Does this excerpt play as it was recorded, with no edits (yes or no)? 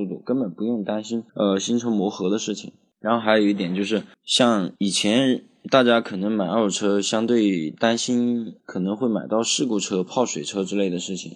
no